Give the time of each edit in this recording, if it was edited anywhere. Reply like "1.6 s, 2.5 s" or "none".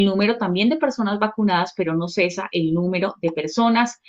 none

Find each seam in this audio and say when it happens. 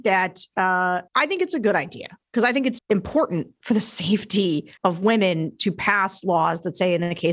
1.1 s, 2.8 s, 4.8 s

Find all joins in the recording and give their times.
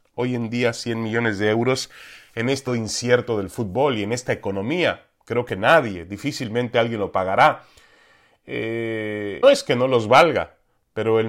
2.7 s, 9.4 s

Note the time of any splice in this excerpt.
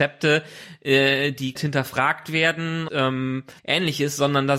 1.6 s, 2.9 s, 3.6 s

